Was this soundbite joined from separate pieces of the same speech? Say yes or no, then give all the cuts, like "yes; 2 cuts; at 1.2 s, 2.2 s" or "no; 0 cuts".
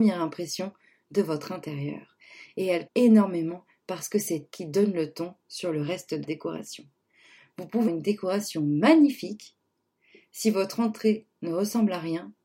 yes; 4 cuts; at 2.9 s, 4.5 s, 6.2 s, 7.9 s